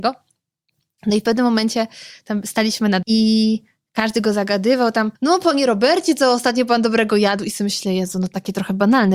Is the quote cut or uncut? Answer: cut